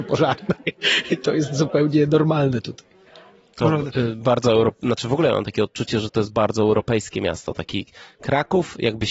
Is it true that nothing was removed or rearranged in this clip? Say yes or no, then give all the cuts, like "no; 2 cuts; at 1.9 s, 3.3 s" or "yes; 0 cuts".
yes; 0 cuts